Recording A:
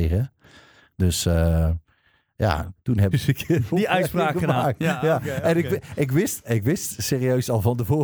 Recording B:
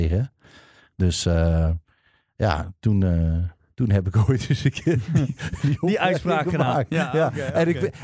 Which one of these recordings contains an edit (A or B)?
A